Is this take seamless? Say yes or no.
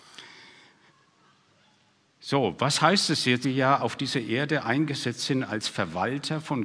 no